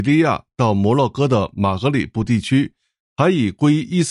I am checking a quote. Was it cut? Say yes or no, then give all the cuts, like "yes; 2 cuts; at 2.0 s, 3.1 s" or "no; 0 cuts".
no; 0 cuts